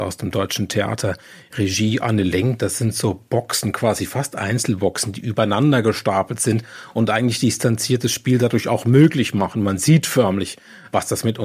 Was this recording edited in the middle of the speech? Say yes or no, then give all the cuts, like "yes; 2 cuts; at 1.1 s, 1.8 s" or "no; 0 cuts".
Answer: no; 0 cuts